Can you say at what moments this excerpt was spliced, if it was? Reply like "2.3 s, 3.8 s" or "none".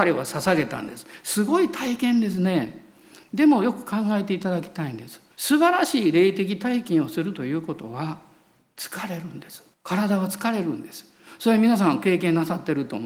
5.3 s, 9.7 s